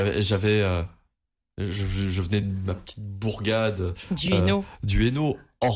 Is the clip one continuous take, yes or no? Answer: yes